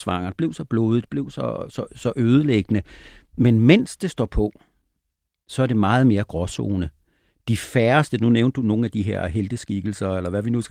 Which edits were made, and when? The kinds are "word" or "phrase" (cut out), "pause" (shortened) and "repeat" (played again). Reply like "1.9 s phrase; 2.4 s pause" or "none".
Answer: none

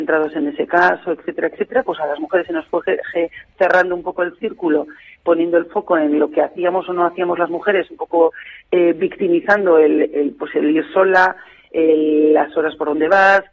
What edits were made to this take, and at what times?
none

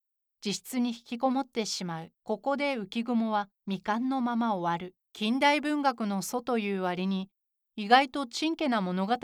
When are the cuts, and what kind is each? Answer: 2.2 s pause; 3.5 s pause; 5.0 s pause

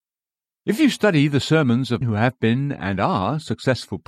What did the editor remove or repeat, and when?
2.0 s word

